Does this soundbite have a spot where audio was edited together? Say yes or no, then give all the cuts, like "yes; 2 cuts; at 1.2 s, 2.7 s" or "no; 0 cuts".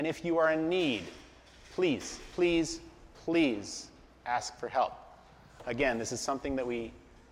no; 0 cuts